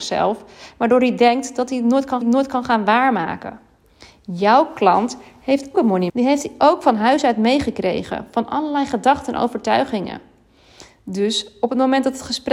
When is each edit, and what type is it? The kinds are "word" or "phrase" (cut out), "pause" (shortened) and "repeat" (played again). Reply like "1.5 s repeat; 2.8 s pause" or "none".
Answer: 2.2 s repeat; 5.7 s word; 6.1 s word